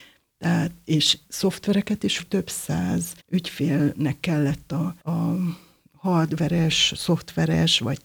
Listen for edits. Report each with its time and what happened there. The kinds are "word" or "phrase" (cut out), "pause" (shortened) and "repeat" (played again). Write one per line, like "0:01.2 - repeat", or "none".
0:01.2 - word
0:02.2 - phrase
0:03.2 - pause
0:05.0 - pause